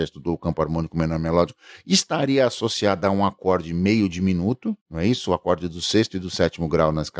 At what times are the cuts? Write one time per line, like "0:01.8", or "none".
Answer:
0:04.8